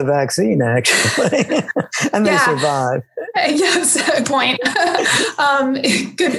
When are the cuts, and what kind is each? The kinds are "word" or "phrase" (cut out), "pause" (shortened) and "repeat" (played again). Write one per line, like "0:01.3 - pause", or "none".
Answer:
0:04.2 - word